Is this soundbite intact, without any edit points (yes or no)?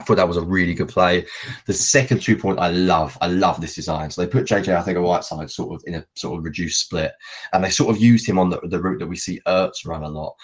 yes